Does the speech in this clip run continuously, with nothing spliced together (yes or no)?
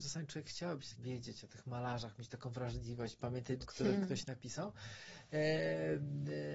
no